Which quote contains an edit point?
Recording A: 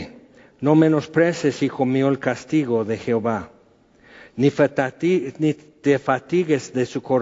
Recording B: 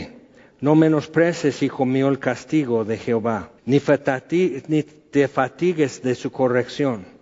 B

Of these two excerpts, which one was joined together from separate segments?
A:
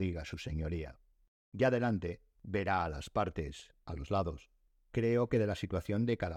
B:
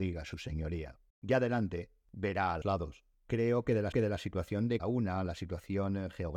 B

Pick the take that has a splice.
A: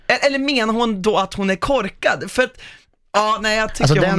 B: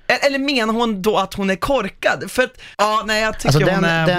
B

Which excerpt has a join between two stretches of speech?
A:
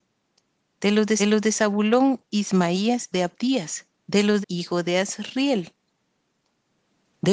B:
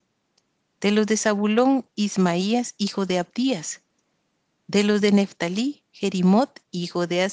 A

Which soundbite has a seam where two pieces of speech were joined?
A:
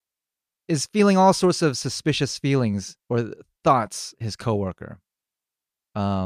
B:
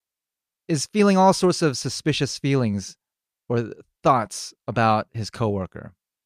A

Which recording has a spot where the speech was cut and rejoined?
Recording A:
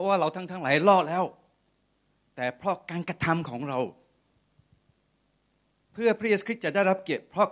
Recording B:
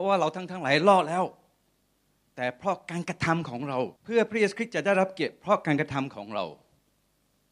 B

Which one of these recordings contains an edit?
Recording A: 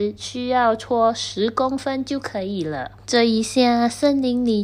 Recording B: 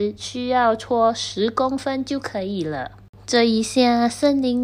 A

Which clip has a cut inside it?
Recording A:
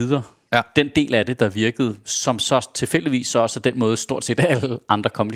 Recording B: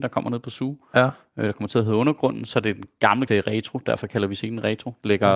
B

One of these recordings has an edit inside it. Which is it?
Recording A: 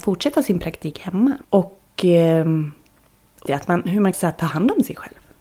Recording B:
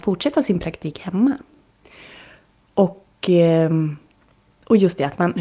A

